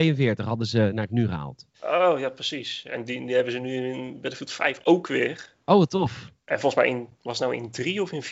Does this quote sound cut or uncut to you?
cut